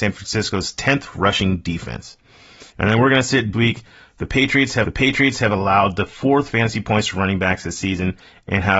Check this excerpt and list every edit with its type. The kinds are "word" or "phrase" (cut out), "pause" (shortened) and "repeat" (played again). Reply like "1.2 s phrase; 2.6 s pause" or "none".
1.1 s word; 2.7 s pause; 3.5 s phrase; 4.8 s repeat; 6.5 s word